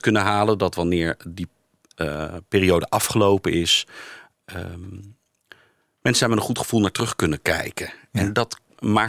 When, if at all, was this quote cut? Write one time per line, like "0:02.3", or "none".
none